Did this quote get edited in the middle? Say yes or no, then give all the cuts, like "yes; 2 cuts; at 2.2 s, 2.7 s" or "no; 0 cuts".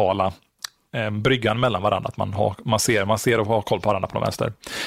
no; 0 cuts